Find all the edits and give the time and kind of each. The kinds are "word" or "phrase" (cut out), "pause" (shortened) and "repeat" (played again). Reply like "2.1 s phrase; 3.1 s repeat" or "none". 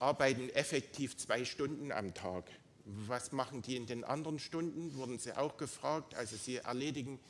none